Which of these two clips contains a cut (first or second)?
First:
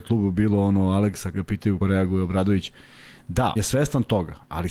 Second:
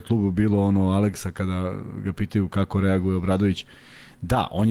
first